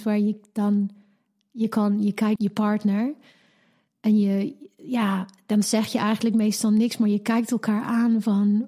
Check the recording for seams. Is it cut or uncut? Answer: cut